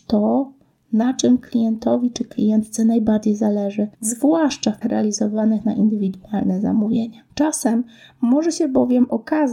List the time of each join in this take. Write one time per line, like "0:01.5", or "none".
0:03.9
0:04.8
0:07.3